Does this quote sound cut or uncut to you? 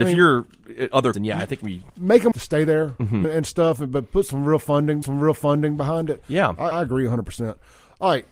cut